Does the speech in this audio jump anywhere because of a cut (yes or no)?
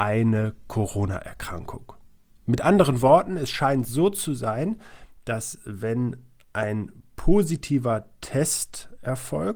no